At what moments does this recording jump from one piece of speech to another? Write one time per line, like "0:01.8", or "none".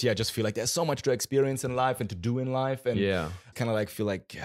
0:03.5